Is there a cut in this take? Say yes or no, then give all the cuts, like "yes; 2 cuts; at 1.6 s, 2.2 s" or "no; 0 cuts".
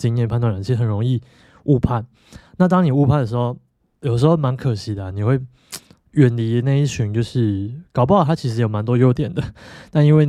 no; 0 cuts